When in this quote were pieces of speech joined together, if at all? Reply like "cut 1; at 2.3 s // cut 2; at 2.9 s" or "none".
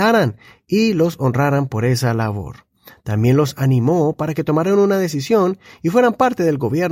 none